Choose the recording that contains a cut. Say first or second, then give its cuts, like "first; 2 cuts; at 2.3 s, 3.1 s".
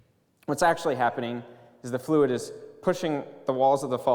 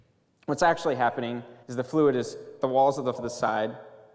second; 3 cuts; at 1.6 s, 2.6 s, 3.1 s